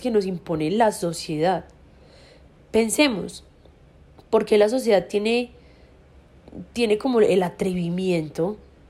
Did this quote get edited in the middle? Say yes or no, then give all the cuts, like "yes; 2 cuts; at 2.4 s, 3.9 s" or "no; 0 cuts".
no; 0 cuts